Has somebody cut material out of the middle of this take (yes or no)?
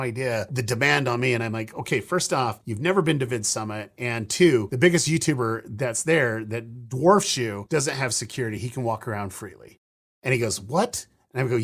no